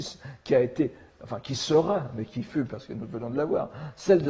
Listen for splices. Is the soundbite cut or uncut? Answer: uncut